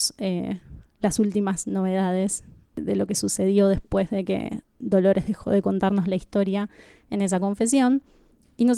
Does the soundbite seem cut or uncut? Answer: uncut